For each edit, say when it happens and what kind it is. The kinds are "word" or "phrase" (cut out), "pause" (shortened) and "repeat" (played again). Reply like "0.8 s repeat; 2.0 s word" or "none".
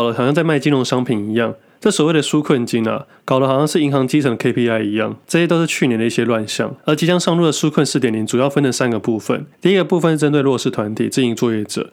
9.5 s pause